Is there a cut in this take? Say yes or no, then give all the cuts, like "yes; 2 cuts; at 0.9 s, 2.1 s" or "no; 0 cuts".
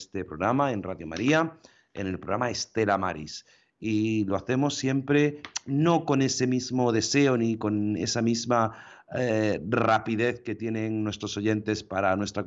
no; 0 cuts